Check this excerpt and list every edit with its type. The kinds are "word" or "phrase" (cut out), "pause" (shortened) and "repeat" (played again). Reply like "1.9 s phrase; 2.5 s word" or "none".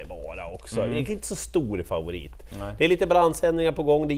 1.1 s word